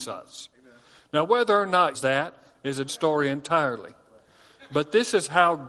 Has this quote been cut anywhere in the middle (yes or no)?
yes